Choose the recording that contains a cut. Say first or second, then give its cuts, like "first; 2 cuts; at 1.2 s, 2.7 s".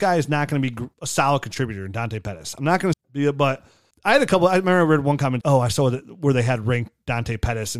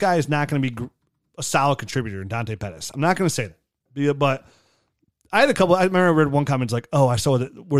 first; 4 cuts; at 0.9 s, 2.9 s, 3.9 s, 5.4 s